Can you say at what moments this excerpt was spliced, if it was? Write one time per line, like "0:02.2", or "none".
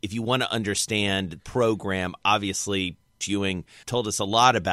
0:01.4
0:03.2
0:03.8